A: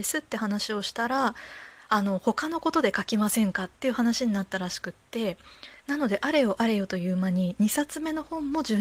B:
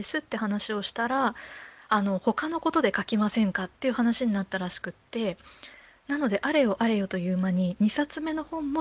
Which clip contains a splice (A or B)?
A